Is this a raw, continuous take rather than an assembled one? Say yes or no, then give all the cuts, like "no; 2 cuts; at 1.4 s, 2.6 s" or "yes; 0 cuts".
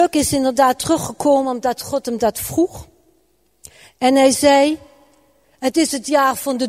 yes; 0 cuts